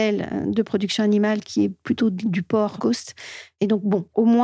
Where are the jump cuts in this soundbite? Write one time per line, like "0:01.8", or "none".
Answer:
0:02.8